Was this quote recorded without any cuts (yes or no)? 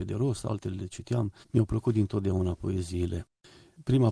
no